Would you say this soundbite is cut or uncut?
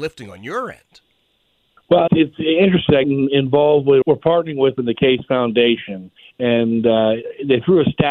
cut